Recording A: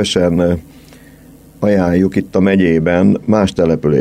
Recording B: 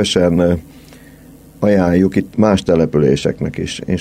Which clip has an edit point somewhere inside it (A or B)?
B